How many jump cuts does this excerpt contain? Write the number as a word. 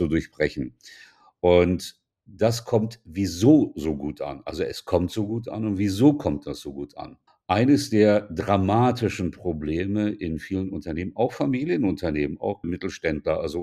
two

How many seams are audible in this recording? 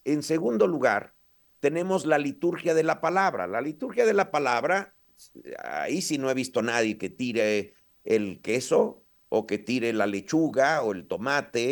zero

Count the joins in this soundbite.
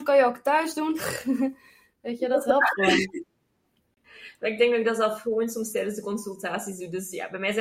zero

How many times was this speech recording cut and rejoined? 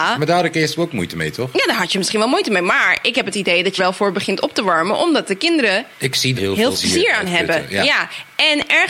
four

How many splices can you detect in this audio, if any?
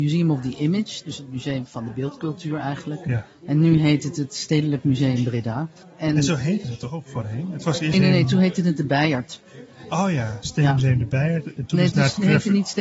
two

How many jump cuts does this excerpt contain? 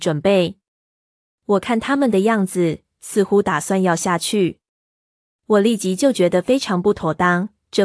zero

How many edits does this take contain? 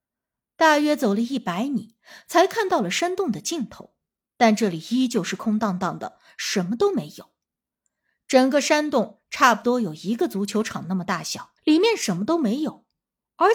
two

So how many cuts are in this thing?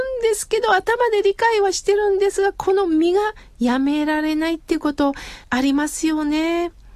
one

